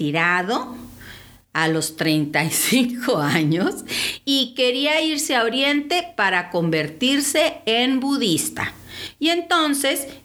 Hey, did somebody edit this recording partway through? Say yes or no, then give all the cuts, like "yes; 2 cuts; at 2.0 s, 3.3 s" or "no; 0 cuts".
no; 0 cuts